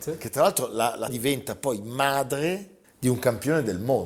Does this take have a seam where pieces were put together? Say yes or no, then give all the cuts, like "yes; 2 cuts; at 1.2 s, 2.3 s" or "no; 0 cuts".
yes; 2 cuts; at 1.1 s, 2.8 s